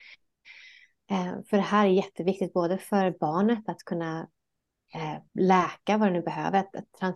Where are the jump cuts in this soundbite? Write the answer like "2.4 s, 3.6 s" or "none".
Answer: 5.3 s